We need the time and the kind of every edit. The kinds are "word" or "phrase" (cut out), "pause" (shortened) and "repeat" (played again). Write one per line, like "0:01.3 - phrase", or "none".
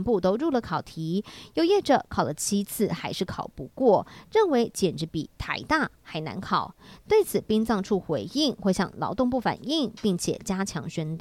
none